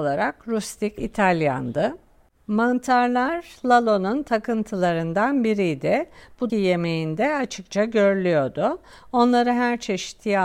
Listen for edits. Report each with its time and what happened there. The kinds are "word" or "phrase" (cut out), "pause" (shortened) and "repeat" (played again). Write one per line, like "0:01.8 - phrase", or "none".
0:01.0 - phrase
0:06.5 - phrase